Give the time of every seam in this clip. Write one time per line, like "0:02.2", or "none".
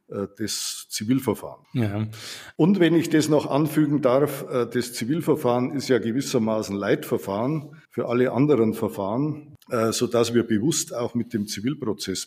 0:07.8